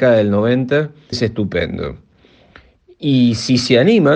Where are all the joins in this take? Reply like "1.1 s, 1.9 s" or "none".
1.1 s